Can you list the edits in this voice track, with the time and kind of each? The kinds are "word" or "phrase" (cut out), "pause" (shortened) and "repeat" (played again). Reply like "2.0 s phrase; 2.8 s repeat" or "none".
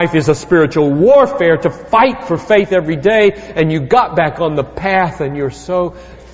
none